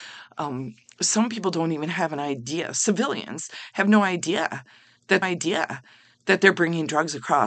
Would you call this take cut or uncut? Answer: cut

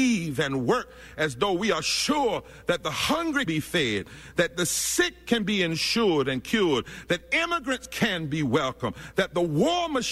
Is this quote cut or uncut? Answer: cut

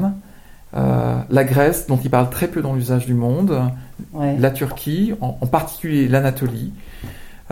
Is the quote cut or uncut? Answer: uncut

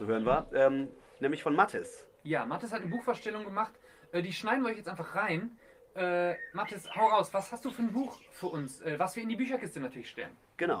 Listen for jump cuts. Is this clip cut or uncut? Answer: uncut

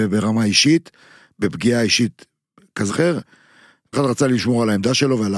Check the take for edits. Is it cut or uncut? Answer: cut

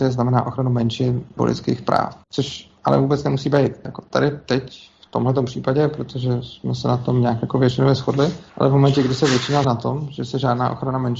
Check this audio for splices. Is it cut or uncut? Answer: cut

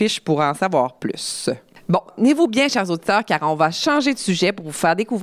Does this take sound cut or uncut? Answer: uncut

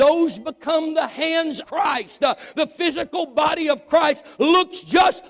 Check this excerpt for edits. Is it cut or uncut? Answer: cut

